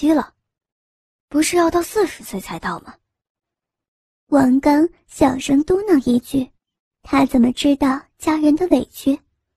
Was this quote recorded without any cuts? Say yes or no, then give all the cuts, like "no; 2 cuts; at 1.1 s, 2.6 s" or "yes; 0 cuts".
no; 1 cut; at 6.6 s